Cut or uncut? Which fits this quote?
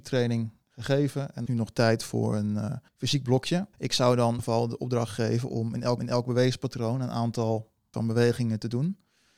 cut